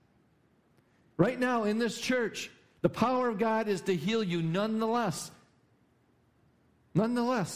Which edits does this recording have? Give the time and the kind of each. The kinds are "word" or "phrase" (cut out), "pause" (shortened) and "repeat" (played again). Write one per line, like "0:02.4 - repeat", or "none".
none